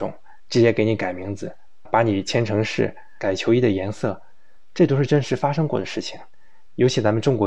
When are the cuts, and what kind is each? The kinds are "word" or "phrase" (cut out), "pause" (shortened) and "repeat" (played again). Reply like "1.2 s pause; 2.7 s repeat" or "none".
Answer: 1.8 s word